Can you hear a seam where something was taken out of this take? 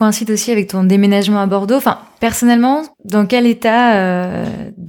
no; 0 cuts

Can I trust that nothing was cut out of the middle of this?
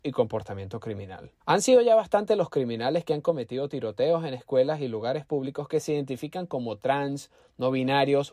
no; 1 cut; at 1.4 s

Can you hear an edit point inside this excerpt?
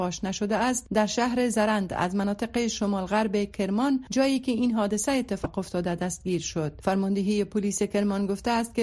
no; 0 cuts

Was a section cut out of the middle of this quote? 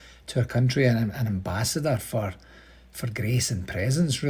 no; 0 cuts

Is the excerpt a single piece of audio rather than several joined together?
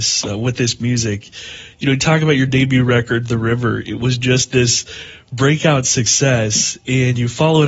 yes; 0 cuts

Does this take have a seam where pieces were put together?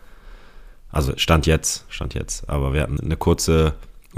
yes; 1 cut; at 3.0 s

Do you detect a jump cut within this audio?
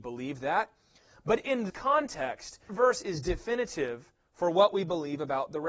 yes; 2 cuts; at 1.7 s, 2.7 s

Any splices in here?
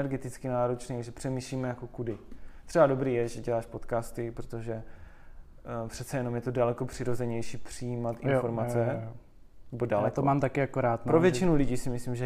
no; 0 cuts

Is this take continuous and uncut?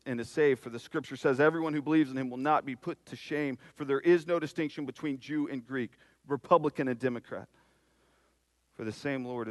yes; 0 cuts

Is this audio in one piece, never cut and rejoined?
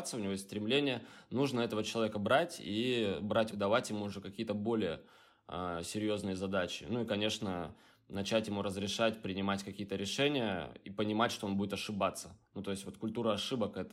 no; 1 cut; at 3.5 s

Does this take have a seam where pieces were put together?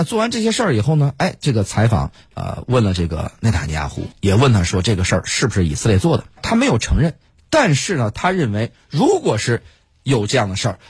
yes; 2 cuts; at 4.1 s, 6.4 s

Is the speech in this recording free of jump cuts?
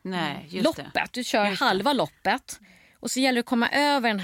yes; 0 cuts

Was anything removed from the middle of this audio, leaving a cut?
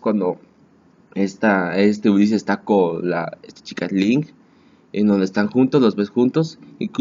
no; 0 cuts

